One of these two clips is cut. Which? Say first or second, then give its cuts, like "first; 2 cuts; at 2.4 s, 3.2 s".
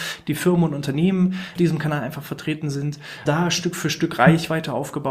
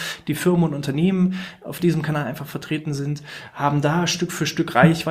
first; 2 cuts; at 1.5 s, 3.3 s